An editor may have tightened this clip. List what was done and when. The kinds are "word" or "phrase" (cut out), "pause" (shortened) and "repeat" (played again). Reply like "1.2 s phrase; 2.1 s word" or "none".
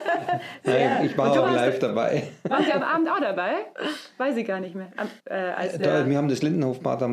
5.2 s pause